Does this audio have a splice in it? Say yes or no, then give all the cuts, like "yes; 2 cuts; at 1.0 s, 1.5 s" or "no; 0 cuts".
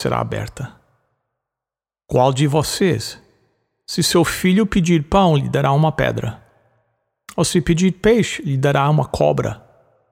no; 0 cuts